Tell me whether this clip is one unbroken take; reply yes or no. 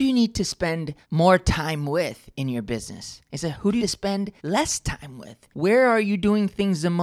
no